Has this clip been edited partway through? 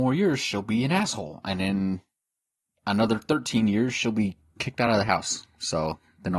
no; 0 cuts

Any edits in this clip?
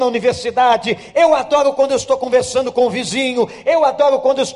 no; 0 cuts

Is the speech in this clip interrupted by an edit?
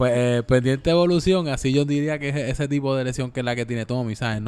no; 0 cuts

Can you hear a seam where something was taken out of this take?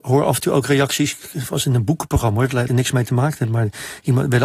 yes; 1 cut; at 2.7 s

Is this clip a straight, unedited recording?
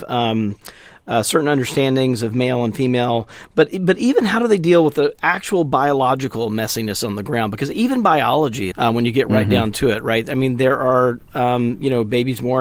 no; 1 cut; at 8.7 s

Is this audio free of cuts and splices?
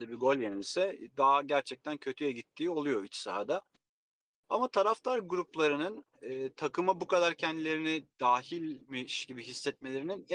yes; 0 cuts

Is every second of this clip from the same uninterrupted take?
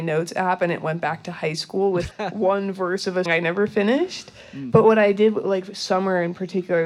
no; 2 cuts; at 2.1 s, 3.3 s

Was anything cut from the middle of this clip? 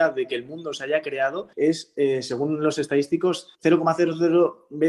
yes; 2 cuts; at 1.5 s, 3.5 s

